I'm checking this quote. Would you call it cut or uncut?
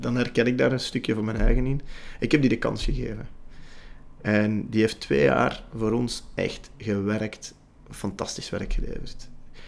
uncut